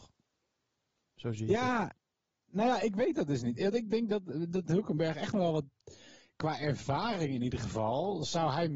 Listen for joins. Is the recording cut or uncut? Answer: uncut